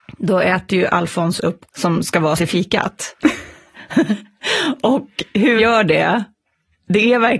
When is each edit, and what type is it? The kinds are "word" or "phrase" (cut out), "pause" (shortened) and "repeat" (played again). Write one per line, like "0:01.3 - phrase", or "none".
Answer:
0:01.7 - word
0:02.4 - word
0:05.6 - word